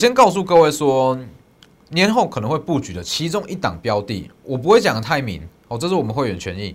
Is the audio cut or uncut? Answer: uncut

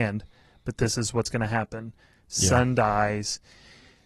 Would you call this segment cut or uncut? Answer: uncut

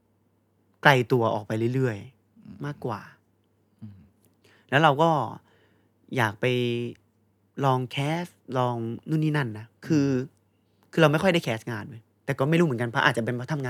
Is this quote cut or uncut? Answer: uncut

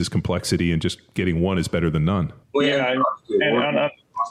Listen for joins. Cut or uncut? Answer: cut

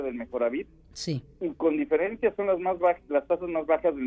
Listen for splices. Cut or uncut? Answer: uncut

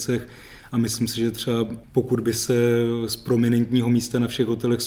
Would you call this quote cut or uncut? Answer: uncut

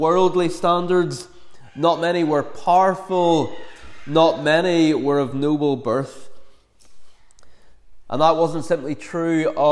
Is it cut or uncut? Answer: uncut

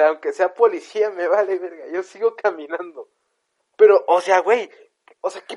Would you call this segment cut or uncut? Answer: uncut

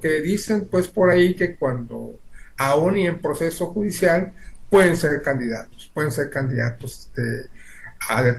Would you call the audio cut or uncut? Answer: uncut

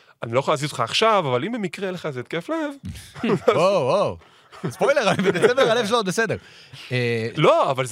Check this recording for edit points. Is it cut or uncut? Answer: uncut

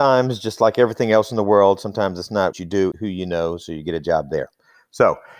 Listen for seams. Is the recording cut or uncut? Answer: cut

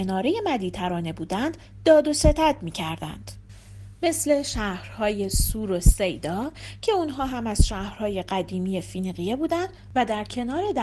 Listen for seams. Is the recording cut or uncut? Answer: uncut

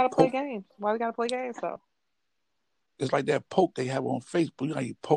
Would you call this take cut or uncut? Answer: cut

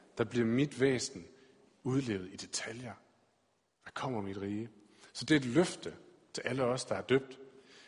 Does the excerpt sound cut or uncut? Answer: uncut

